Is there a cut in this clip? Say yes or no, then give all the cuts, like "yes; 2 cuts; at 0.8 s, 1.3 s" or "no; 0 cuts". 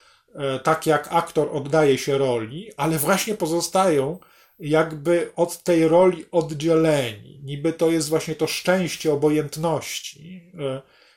no; 0 cuts